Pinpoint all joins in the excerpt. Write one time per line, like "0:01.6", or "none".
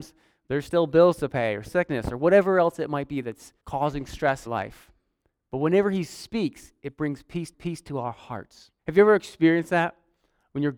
0:01.6
0:03.6
0:04.5
0:07.5
0:08.8